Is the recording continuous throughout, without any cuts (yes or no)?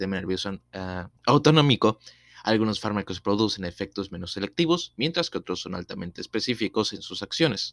no